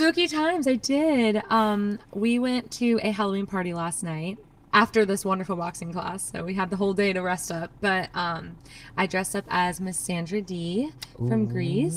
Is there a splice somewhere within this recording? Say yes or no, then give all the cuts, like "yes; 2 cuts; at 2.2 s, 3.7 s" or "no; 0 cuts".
no; 0 cuts